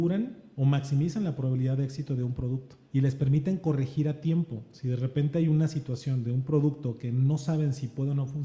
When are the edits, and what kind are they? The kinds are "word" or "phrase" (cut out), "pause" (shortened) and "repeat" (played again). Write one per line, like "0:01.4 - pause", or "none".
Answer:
0:02.8 - pause